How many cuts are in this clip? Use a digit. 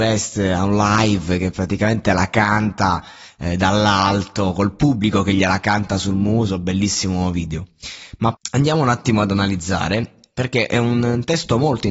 1